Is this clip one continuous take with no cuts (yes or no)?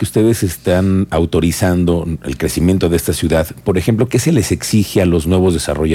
yes